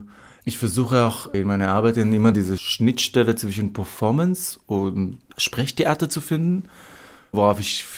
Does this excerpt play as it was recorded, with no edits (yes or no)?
yes